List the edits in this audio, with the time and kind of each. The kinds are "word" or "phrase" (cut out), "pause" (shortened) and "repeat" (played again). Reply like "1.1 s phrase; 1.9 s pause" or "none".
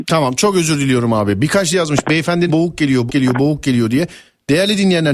1.7 s word; 2.5 s word; 3.1 s word